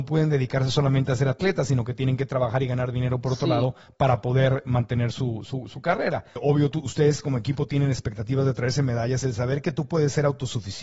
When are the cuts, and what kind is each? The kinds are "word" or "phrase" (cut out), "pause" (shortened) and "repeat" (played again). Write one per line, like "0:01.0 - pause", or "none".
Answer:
none